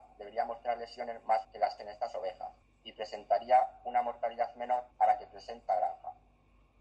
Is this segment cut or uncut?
cut